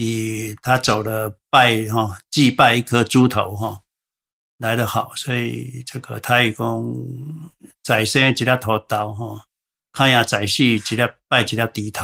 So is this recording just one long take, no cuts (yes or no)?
yes